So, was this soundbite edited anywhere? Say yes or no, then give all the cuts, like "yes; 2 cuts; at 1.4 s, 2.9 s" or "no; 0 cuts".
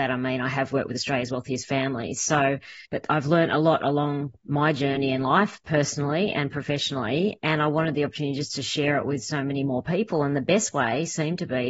yes; 1 cut; at 2.8 s